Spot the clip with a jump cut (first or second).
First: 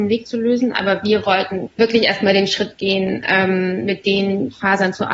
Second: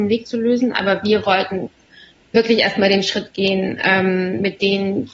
first